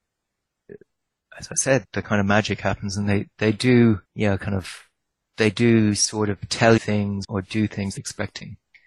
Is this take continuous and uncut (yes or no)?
no